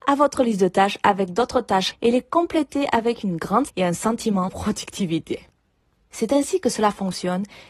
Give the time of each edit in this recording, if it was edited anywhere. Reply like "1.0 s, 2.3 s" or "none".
1.9 s, 3.7 s, 4.5 s